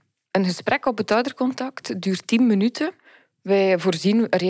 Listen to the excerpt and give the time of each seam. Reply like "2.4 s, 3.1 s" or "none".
none

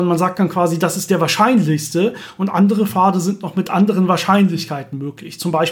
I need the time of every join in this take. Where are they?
none

